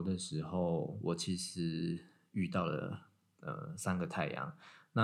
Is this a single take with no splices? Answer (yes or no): yes